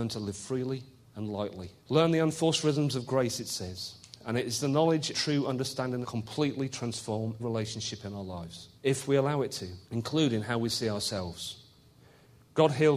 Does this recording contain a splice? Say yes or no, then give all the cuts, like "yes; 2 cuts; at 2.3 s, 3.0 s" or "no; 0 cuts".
yes; 7 cuts; at 1.0 s, 1.8 s, 5.1 s, 6.0 s, 7.4 s, 8.8 s, 9.8 s